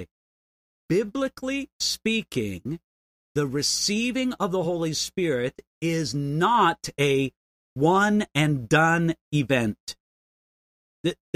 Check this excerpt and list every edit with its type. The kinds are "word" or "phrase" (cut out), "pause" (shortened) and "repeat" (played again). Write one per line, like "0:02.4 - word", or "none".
none